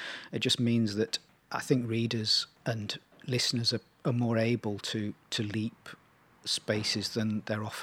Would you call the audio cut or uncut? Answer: uncut